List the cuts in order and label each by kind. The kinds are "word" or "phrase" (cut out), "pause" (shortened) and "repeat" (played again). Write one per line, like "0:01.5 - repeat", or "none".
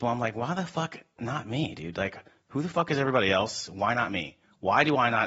none